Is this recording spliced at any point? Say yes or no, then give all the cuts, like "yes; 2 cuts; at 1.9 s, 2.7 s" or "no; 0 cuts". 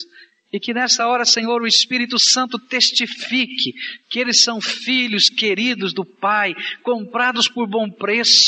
no; 0 cuts